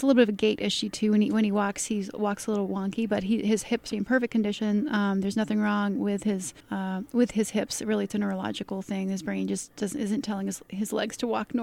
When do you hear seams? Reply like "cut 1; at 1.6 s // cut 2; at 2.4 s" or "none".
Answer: cut 1; at 3.9 s // cut 2; at 6.6 s